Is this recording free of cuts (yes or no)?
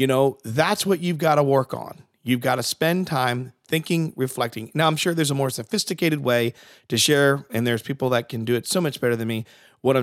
yes